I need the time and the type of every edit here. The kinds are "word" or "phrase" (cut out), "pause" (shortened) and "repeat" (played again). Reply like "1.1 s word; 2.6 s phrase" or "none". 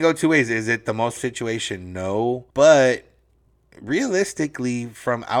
1.2 s word; 2.5 s pause